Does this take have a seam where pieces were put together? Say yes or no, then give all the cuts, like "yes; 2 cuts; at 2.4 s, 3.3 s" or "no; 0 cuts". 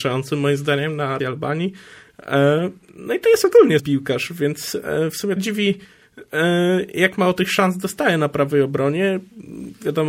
yes; 3 cuts; at 1.2 s, 3.8 s, 5.4 s